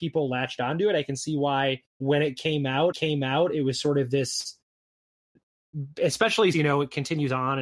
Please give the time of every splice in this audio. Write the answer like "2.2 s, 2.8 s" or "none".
1.9 s, 2.9 s, 6.5 s